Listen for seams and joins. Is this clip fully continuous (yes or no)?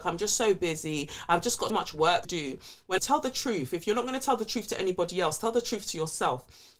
no